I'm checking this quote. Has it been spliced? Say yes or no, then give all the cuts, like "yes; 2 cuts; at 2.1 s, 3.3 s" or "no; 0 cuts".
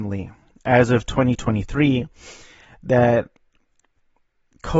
no; 0 cuts